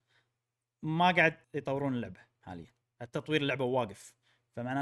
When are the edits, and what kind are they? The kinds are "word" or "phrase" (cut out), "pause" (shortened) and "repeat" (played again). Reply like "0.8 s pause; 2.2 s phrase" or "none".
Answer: 1.4 s pause; 2.8 s pause